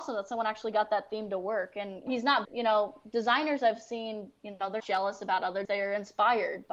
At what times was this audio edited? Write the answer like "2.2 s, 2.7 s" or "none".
2.1 s, 2.4 s, 4.8 s, 5.6 s